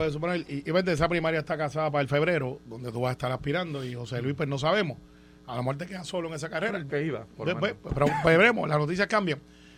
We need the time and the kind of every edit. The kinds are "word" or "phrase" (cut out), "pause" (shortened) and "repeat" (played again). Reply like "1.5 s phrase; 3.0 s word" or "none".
6.9 s word